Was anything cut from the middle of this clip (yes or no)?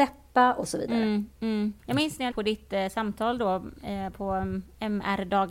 yes